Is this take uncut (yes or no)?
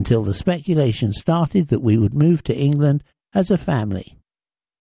yes